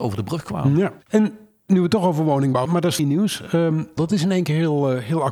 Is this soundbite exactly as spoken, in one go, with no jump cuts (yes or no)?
no